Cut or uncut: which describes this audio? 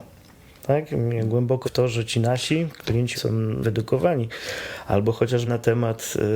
cut